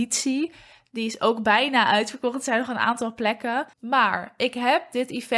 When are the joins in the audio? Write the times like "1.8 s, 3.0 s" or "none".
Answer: 3.7 s